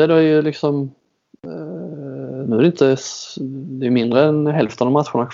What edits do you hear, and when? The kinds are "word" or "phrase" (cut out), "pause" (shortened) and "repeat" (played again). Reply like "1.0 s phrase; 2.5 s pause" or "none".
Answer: none